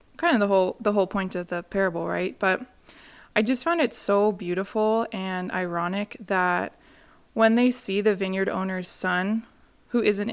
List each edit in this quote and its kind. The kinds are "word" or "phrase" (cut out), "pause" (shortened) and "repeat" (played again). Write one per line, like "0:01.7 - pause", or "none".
none